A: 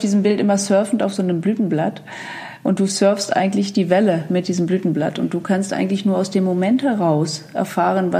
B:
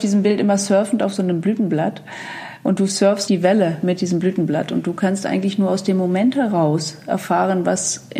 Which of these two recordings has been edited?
B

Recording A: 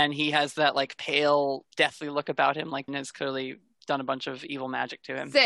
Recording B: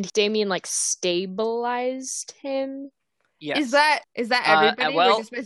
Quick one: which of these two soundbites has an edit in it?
A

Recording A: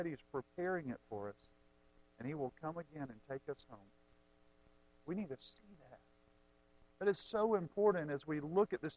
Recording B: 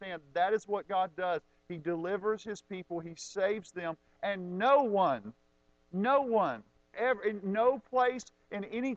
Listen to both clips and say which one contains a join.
B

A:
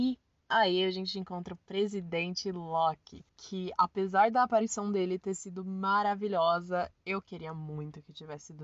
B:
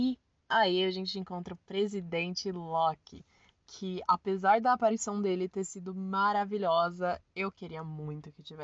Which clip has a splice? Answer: A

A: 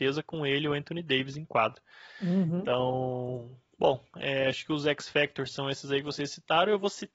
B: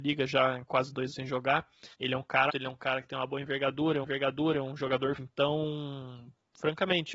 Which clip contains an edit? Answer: B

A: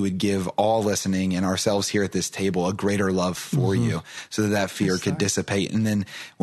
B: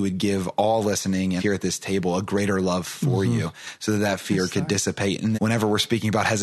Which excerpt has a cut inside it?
B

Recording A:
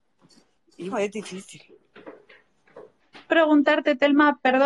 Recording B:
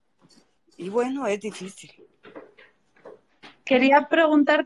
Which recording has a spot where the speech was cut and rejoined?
A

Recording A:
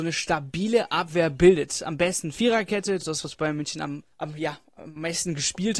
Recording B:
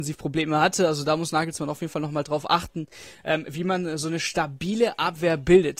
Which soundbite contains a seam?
A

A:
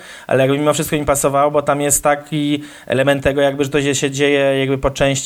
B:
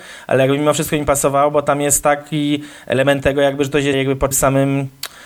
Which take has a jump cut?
B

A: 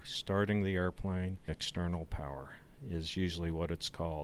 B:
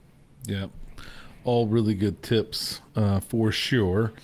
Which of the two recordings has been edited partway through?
A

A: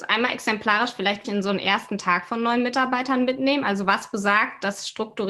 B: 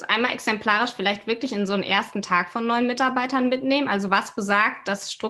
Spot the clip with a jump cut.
A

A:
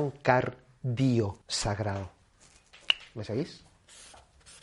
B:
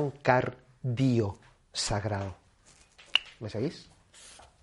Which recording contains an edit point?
A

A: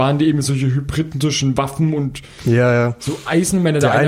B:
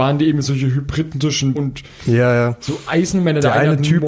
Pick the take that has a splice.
B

